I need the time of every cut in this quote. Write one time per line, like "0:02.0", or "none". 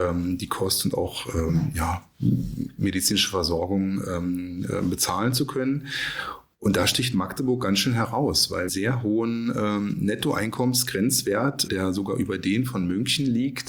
0:08.7
0:11.7